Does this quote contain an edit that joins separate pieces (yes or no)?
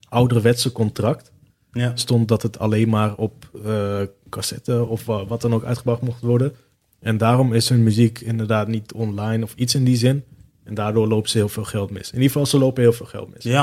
no